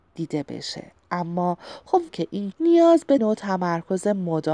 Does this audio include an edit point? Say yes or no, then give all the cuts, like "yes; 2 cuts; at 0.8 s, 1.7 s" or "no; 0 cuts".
yes; 3 cuts; at 2.1 s, 2.5 s, 3.2 s